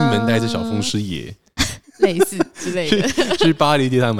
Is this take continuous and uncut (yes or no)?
yes